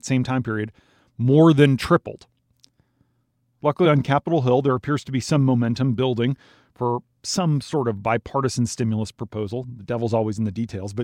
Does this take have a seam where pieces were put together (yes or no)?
no